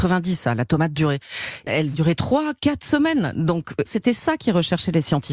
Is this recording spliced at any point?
yes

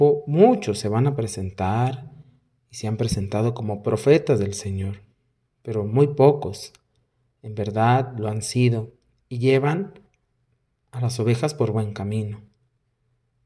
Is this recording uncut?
yes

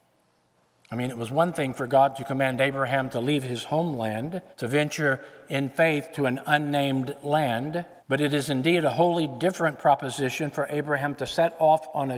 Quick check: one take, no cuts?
no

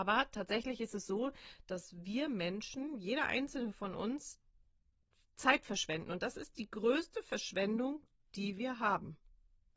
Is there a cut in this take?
no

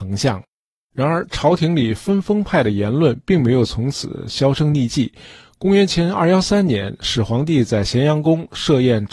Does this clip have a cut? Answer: no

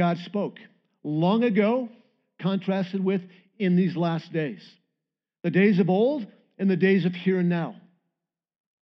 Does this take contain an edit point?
no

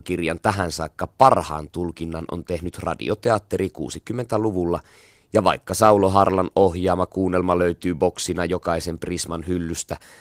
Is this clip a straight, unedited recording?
yes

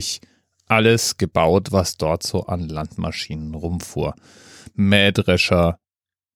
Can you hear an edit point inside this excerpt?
no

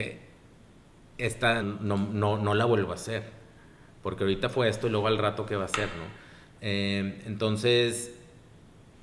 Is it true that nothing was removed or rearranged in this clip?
no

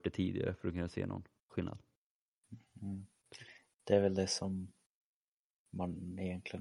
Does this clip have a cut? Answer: no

